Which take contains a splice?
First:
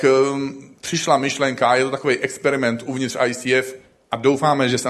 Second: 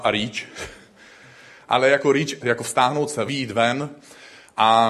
second; 2 cuts; at 2.4 s, 3.3 s

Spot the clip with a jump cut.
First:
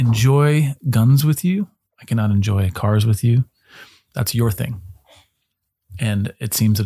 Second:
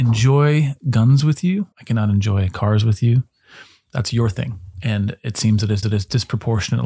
second; 3 cuts; at 1.7 s, 4.7 s, 5.8 s

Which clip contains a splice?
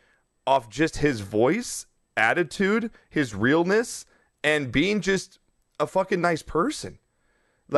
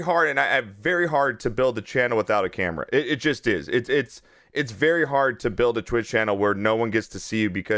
first; 1 cut; at 2.1 s

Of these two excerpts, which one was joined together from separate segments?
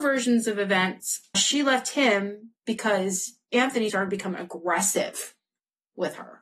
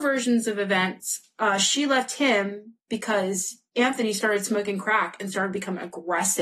first; 2 cuts; at 1.3 s, 3.9 s

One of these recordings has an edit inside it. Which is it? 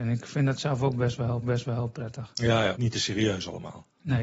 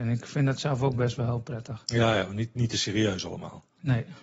first; 2 cuts; at 1.4 s, 2.7 s

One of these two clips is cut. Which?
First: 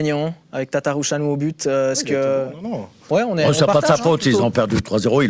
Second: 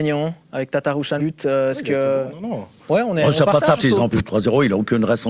second; 3 cuts; at 1.2 s, 3.8 s, 4.1 s

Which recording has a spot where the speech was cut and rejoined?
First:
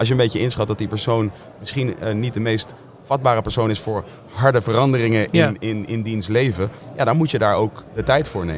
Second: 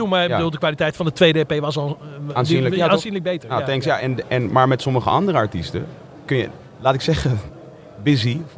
second; 2 cuts; at 4.0 s, 6.3 s

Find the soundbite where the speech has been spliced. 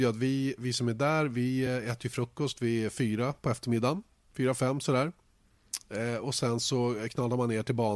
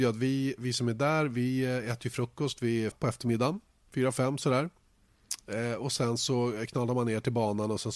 second; 1 cut; at 2.9 s

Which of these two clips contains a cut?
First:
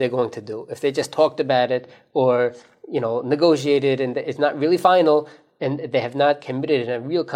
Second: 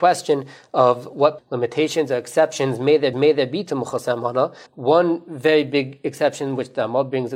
second; 3 cuts; at 1.4 s, 3.1 s, 4.7 s

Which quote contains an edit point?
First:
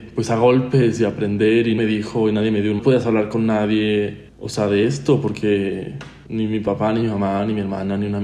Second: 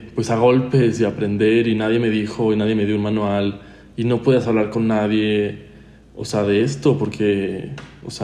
first; 4 cuts; at 1.8 s, 2.8 s, 4.3 s, 6.3 s

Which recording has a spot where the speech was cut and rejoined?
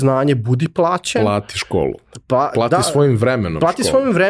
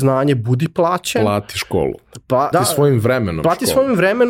second; 1 cut; at 2.5 s

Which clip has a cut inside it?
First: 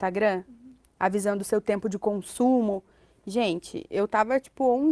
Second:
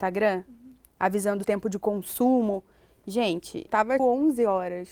second; 3 cuts; at 1.4 s, 3.7 s, 4.0 s

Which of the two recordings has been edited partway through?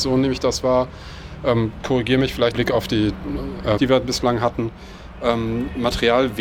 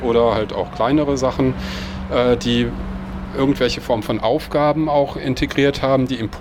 first; 2 cuts; at 2.5 s, 3.8 s

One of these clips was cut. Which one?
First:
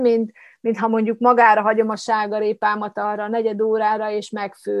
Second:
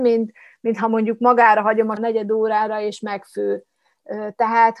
second; 1 cut; at 2.0 s

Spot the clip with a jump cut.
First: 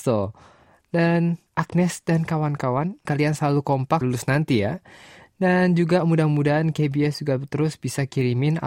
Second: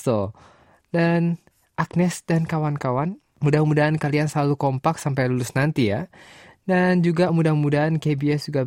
first; 3 cuts; at 1.5 s, 3.1 s, 4.0 s

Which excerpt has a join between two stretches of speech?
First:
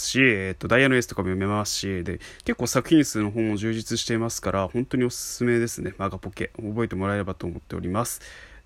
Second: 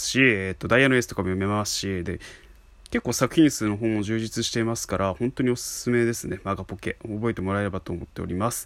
first; 1 cut; at 2.4 s

